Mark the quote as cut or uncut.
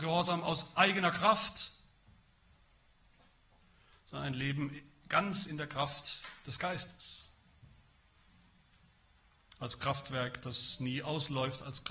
uncut